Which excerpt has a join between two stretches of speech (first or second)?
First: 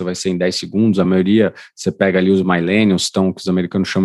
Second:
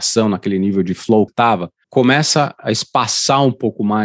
second